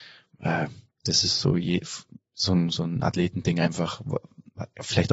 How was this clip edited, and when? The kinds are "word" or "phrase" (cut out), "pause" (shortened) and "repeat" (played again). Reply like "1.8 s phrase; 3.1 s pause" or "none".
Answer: none

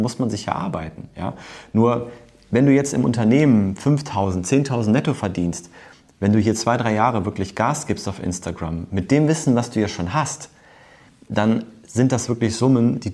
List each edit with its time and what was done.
none

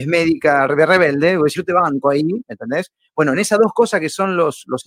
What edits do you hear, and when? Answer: 1.6 s word

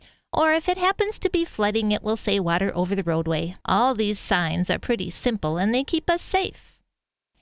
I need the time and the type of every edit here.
3.6 s pause

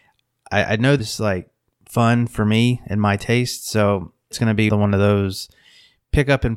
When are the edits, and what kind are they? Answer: 1.0 s word; 4.3 s word; 4.7 s word

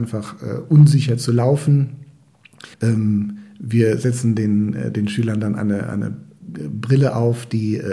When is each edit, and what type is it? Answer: 2.7 s pause

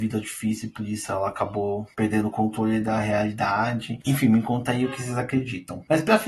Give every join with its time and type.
none

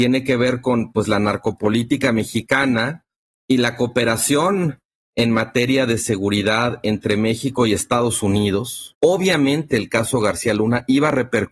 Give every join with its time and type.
none

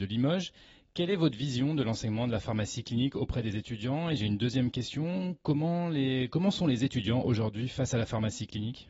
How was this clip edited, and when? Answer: none

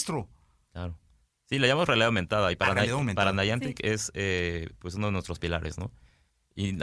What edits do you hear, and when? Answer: none

